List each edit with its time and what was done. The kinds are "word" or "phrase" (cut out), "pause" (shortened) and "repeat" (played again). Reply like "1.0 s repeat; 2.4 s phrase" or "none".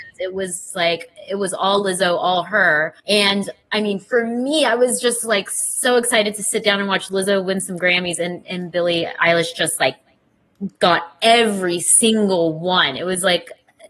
3.0 s pause